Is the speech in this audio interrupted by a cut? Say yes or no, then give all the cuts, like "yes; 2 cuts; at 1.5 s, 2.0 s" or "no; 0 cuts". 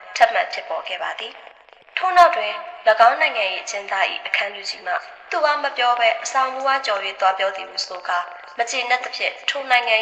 yes; 1 cut; at 1.5 s